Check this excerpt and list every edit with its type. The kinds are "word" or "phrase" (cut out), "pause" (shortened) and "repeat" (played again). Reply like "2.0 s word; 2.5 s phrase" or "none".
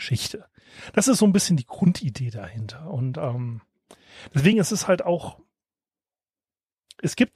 none